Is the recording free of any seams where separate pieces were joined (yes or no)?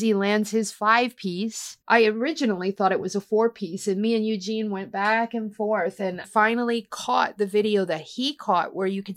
no